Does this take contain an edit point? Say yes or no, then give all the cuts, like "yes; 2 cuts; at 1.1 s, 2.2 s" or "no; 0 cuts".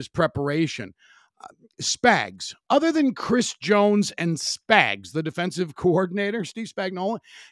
no; 0 cuts